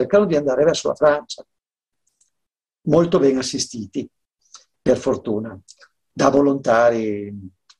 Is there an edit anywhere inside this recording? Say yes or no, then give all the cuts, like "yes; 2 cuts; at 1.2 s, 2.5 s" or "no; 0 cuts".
no; 0 cuts